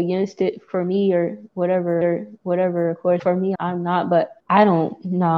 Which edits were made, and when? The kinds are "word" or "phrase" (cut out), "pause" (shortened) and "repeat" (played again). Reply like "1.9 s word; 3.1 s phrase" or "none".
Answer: 2.0 s repeat; 3.2 s word; 3.5 s word; 4.4 s pause